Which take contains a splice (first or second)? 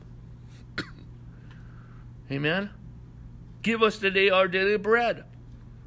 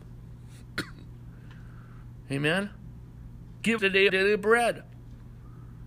second